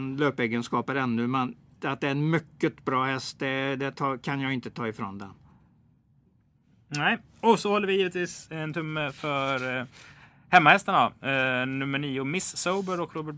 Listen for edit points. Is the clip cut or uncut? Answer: uncut